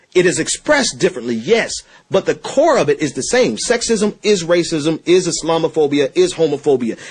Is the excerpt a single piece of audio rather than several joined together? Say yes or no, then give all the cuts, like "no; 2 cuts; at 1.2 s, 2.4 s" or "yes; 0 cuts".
yes; 0 cuts